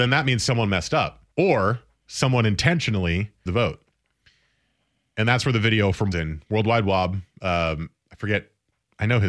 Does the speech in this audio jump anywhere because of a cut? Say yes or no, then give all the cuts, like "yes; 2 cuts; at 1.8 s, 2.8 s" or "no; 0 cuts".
yes; 3 cuts; at 1.3 s, 3.5 s, 6.1 s